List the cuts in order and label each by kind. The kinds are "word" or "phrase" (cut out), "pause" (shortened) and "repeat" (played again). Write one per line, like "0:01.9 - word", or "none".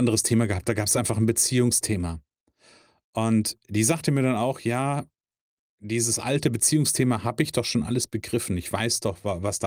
none